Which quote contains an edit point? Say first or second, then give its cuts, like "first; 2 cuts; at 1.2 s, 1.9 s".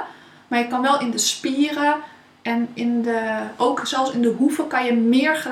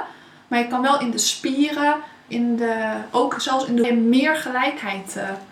second; 2 cuts; at 2.3 s, 3.8 s